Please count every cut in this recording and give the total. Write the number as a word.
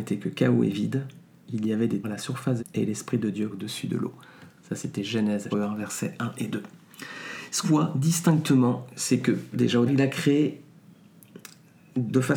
seven